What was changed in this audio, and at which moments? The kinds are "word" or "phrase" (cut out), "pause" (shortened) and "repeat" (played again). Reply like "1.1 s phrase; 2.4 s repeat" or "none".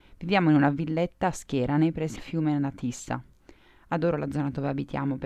2.2 s word